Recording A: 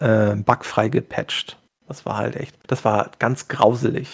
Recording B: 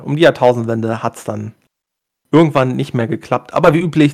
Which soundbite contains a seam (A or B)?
A